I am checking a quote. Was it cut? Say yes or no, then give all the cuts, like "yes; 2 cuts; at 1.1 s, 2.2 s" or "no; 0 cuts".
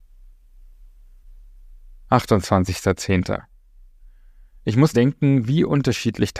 yes; 1 cut; at 4.9 s